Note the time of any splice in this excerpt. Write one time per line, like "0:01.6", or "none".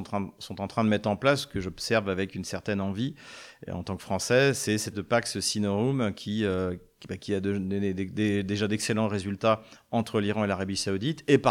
0:04.9